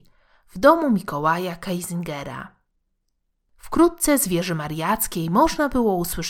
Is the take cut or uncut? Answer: uncut